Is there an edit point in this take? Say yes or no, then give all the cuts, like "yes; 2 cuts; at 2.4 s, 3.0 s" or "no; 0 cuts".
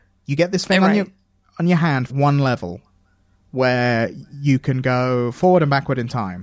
yes; 1 cut; at 2.1 s